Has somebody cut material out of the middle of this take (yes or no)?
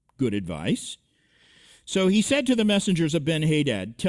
no